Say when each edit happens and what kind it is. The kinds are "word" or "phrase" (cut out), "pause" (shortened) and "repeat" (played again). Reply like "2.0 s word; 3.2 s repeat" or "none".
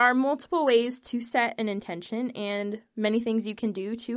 none